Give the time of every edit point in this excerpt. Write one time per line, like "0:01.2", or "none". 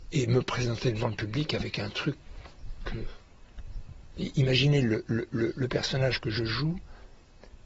none